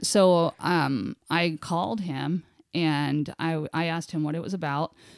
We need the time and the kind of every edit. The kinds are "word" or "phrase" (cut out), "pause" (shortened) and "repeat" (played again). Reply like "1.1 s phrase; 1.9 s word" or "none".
none